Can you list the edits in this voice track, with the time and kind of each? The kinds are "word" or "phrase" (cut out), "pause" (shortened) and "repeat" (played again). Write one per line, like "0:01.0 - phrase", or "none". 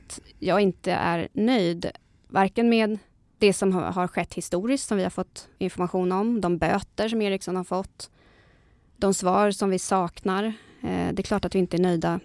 none